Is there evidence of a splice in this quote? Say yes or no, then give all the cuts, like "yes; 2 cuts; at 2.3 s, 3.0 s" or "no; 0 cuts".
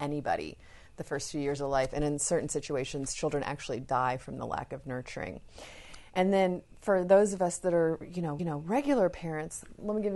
yes; 1 cut; at 8.4 s